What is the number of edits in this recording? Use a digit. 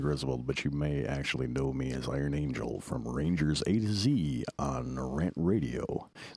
0